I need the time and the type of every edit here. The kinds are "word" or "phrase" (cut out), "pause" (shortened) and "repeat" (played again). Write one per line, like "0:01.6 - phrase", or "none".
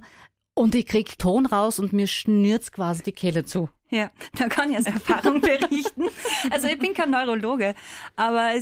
0:01.2 - word
0:04.8 - word